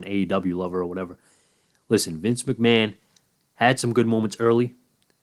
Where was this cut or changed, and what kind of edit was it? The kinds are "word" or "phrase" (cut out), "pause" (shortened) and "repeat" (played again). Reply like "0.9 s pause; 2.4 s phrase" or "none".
none